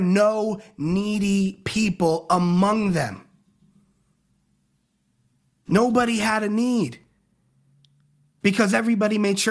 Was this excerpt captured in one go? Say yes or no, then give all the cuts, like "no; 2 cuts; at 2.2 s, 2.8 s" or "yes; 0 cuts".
yes; 0 cuts